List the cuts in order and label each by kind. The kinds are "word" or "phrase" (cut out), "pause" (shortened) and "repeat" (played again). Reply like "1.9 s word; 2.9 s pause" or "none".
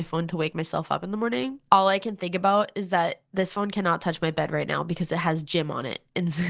1.7 s pause; 3.3 s pause